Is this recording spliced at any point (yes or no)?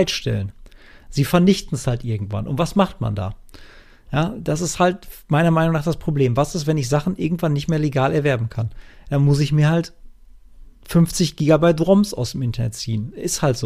no